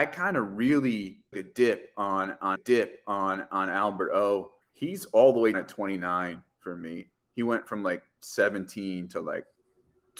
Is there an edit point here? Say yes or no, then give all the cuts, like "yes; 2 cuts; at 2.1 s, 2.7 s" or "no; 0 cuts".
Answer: yes; 4 cuts; at 1.3 s, 2.6 s, 4.6 s, 5.5 s